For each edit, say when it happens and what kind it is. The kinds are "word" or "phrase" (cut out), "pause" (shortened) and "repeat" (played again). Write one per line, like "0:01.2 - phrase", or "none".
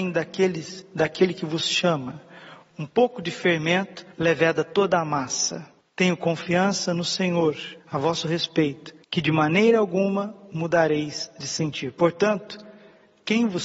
0:04.1 - pause
0:05.8 - pause
0:07.8 - pause
0:09.0 - pause